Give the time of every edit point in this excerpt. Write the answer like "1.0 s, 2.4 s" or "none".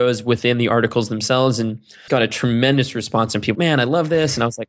2.1 s, 3.5 s